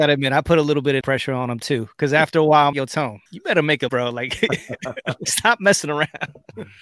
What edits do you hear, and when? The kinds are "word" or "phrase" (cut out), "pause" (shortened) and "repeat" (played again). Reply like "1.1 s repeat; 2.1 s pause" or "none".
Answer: 1.0 s word; 2.7 s word; 3.3 s pause; 3.9 s word; 5.3 s word